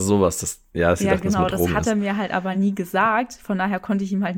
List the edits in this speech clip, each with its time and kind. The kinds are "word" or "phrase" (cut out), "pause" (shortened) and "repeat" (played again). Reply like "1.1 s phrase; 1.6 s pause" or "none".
none